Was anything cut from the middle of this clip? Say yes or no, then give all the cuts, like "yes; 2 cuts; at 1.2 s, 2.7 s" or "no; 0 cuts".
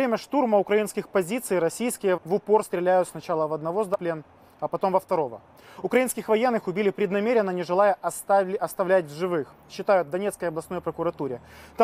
yes; 1 cut; at 2.2 s